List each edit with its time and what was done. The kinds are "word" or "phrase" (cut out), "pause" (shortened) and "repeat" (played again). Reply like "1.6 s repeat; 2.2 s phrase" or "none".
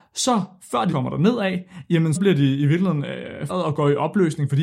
0.9 s word; 2.2 s word; 3.5 s word